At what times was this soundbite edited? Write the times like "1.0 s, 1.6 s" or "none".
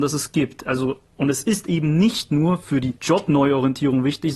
3.0 s